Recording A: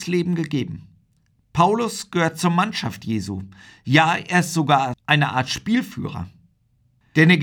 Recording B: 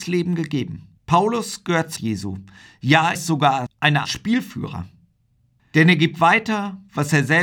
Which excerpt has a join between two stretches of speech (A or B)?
B